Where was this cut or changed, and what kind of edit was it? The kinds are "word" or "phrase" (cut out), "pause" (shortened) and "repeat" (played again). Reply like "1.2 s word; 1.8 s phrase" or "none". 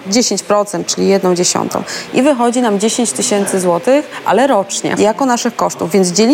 5.0 s word